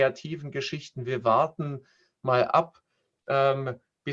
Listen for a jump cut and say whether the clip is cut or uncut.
uncut